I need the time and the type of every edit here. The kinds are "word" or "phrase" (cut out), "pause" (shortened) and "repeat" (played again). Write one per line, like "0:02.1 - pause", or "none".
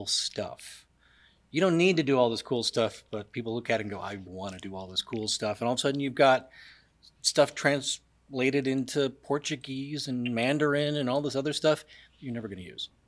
0:04.2 - word